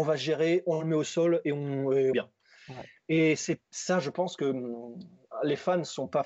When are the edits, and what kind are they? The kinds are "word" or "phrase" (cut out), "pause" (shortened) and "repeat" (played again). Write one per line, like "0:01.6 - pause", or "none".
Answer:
0:02.1 - phrase